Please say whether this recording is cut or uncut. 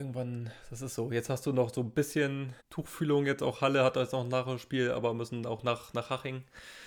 cut